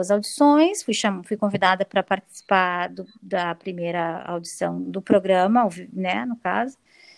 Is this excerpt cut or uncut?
uncut